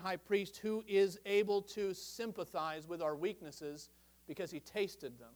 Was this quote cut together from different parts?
no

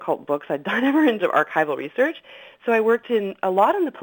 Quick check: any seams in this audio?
yes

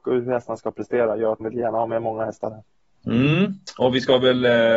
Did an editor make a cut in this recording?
yes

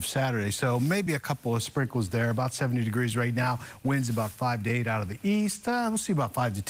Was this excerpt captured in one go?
yes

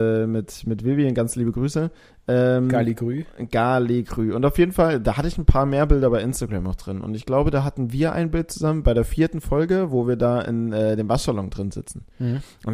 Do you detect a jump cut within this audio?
no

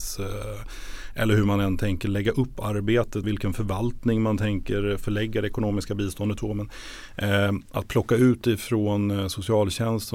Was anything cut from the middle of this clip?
yes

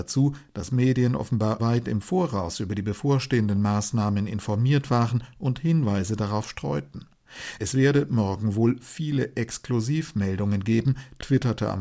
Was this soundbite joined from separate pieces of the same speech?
yes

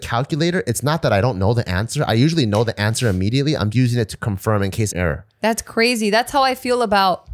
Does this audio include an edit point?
yes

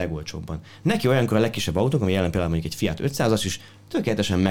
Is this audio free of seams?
yes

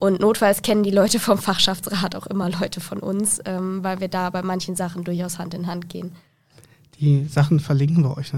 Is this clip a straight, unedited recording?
yes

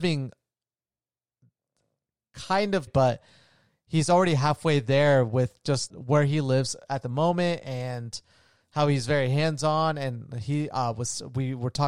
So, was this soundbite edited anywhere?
yes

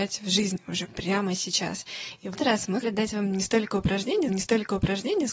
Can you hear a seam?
yes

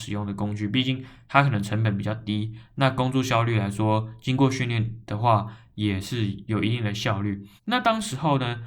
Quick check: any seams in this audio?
yes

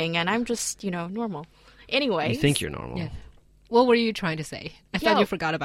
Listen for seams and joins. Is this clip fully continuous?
yes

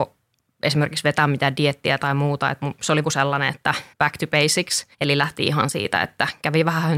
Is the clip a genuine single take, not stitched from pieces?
no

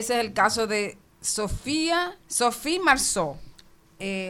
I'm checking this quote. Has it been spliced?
yes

